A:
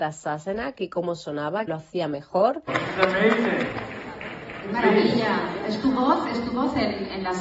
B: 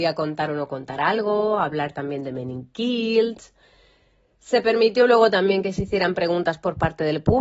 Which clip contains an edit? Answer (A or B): A